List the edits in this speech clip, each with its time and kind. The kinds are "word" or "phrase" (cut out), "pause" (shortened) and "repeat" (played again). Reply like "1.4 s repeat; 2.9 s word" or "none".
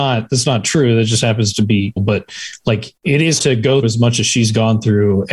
2.0 s word; 3.0 s pause; 3.4 s word; 3.8 s word